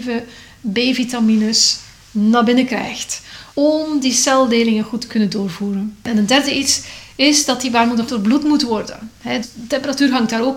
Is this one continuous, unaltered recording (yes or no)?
no